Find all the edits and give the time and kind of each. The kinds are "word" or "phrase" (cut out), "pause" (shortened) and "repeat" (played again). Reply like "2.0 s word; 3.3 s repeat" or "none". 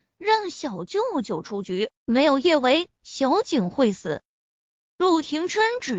2.0 s pause